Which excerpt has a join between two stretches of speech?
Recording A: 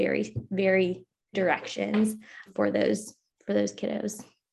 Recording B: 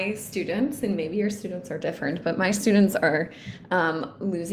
A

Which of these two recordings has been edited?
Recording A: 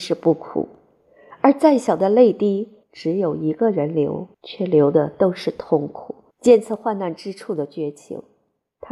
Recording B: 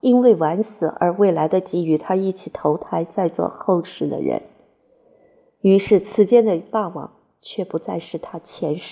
A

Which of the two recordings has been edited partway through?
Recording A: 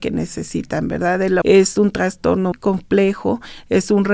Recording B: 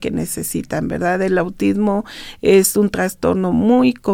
A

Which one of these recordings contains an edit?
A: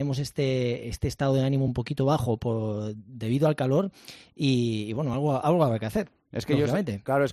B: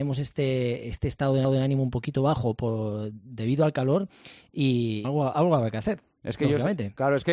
B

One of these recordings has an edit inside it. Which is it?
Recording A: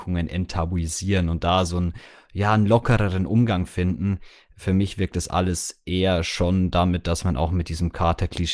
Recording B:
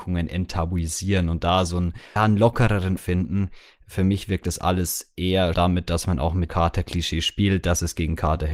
B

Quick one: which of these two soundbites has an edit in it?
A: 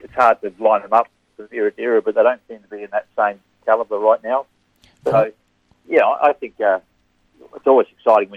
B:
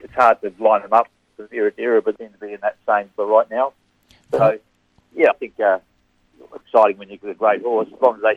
B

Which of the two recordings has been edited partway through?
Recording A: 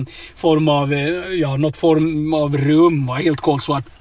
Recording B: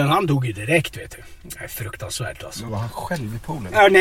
B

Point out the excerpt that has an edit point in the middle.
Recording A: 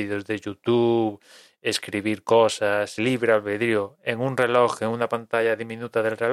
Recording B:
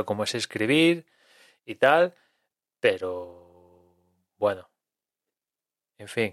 A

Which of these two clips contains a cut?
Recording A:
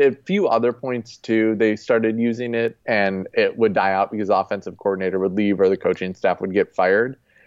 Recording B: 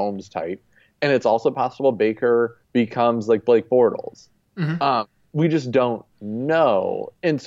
B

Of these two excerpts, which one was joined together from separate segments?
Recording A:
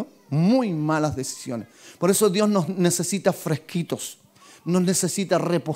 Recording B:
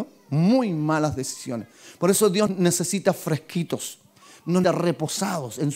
B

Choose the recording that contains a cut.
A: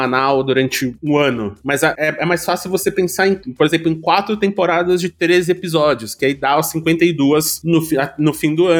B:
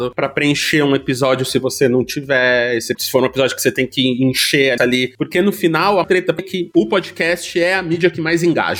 B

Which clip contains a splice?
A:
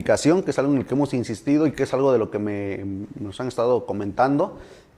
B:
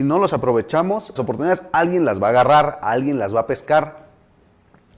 B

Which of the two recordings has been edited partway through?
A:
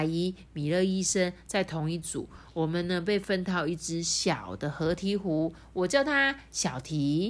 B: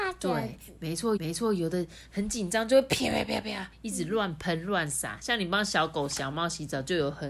B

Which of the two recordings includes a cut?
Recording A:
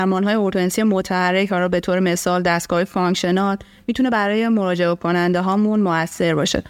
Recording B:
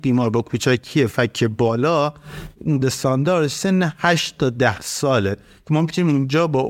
B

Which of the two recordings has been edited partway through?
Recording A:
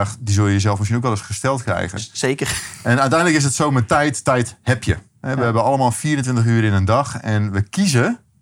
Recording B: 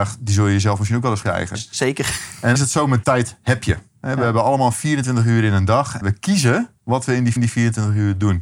B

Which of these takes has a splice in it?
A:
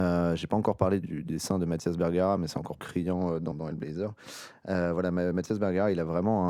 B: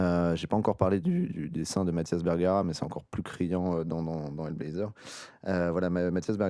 A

